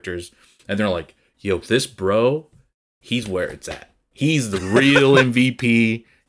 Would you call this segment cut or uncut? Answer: uncut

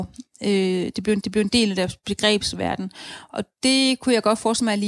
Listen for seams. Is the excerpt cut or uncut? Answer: cut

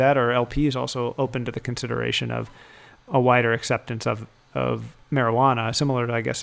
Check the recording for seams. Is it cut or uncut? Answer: uncut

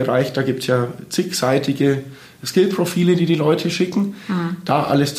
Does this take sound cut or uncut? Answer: uncut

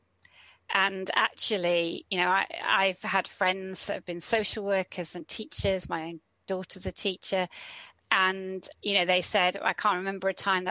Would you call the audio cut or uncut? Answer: uncut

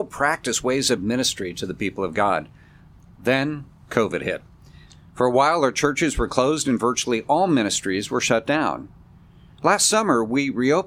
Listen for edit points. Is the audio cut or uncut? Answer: uncut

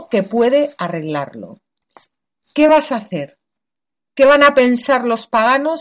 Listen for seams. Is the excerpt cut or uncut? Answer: uncut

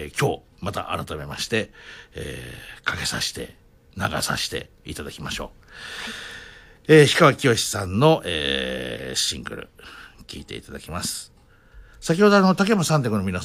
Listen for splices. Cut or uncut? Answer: cut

